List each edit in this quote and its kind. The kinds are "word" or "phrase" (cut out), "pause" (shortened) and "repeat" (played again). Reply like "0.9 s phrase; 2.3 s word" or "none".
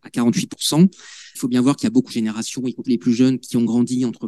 1.3 s word; 2.1 s word; 2.8 s word